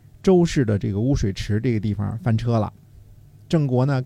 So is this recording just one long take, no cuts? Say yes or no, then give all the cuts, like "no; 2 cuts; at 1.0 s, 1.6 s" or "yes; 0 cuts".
yes; 0 cuts